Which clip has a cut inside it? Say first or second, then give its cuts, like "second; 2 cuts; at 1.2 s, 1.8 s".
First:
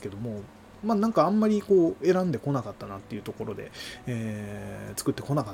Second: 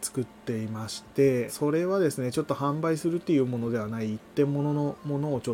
second; 1 cut; at 1.5 s